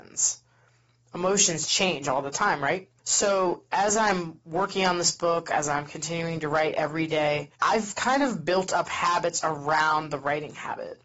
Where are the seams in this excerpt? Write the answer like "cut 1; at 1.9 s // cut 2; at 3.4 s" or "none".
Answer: cut 1; at 3.0 s // cut 2; at 7.6 s